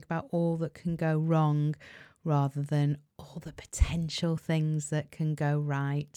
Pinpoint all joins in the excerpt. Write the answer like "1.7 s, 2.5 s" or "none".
none

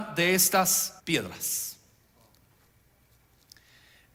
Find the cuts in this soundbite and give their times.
1.0 s

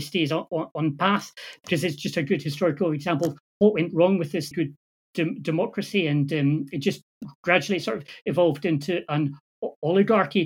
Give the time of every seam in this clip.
4.5 s

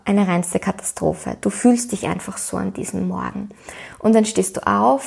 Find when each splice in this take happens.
none

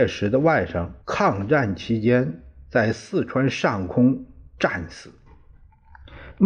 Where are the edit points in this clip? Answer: 1.0 s

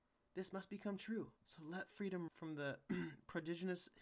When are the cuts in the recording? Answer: 1.4 s, 2.3 s

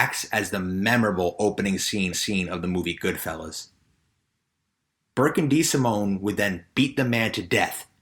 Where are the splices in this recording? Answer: 2.1 s

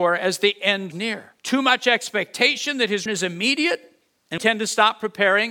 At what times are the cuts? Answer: 0.9 s, 1.4 s, 3.1 s, 4.4 s

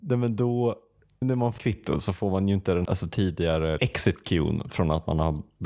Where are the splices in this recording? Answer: 1.2 s, 1.6 s, 2.8 s, 3.8 s

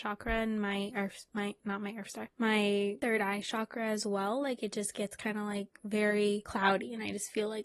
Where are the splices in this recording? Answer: none

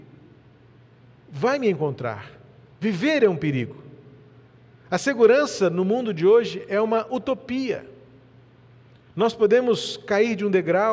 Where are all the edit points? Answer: none

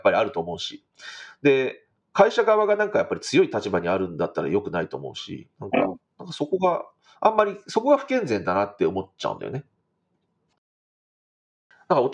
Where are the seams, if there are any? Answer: none

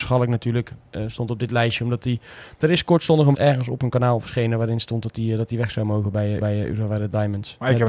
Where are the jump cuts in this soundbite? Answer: 3.3 s, 6.4 s

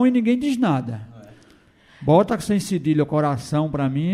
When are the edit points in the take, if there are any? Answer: none

